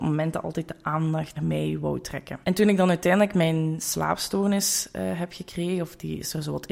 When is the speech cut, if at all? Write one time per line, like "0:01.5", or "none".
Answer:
0:01.4
0:02.4